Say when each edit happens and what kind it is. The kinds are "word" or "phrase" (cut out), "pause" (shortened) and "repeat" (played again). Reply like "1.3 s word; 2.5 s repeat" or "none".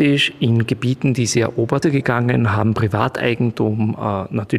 1.8 s phrase